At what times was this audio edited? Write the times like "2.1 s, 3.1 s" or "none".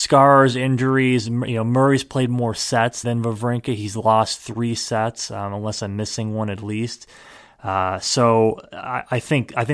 3.0 s